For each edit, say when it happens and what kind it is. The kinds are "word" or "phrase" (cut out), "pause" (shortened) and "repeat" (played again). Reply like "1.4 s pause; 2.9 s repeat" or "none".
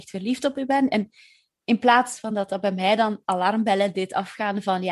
none